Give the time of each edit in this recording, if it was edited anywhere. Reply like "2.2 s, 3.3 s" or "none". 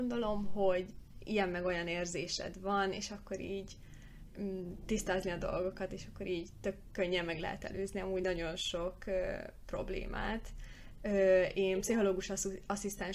none